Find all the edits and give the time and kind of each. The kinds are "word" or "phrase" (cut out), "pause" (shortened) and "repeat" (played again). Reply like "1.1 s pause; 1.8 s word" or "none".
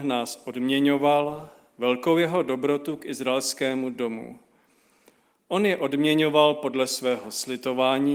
none